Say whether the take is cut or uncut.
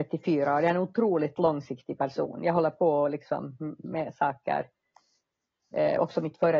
uncut